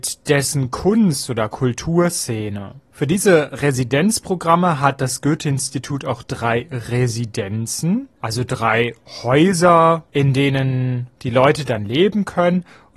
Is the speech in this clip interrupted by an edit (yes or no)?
no